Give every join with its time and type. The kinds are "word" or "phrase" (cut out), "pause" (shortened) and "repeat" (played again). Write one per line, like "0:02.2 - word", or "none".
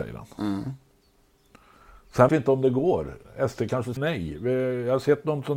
0:02.3 - word
0:04.0 - word